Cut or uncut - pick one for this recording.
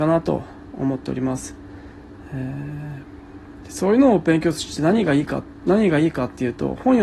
uncut